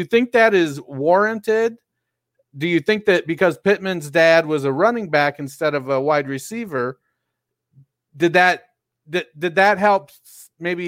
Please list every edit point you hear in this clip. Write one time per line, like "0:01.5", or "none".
none